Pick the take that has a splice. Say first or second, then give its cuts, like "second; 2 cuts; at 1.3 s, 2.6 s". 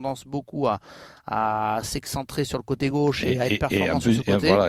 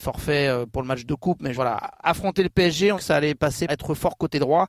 second; 3 cuts; at 1.6 s, 3.0 s, 3.7 s